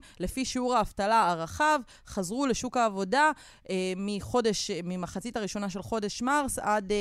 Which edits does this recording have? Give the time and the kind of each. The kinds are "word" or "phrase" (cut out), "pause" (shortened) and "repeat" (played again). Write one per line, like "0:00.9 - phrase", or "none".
none